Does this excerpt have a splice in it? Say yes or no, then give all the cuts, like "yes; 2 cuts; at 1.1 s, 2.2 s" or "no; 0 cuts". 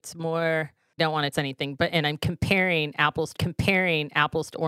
yes; 3 cuts; at 1.0 s, 1.3 s, 3.3 s